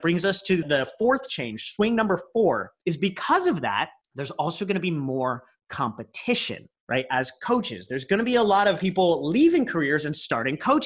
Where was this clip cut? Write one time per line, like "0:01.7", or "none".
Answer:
none